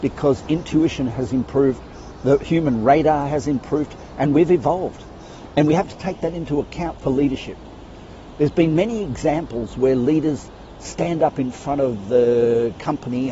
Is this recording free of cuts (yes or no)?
yes